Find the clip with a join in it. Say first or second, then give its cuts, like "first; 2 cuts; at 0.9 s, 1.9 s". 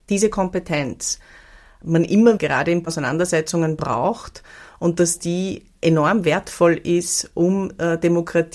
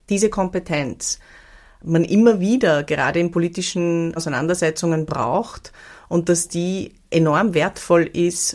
first; 2 cuts; at 2.4 s, 2.8 s